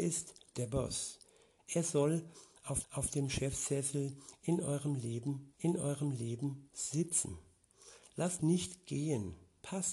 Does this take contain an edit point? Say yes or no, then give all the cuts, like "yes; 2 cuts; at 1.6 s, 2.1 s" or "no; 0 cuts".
yes; 3 cuts; at 2.8 s, 5.5 s, 8.4 s